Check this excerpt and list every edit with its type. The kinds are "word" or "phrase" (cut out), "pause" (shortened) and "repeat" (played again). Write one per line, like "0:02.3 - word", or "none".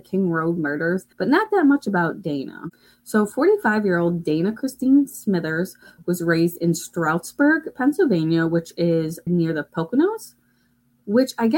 0:01.1 - pause
0:09.3 - word